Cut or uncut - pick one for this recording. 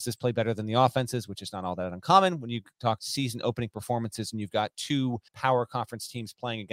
cut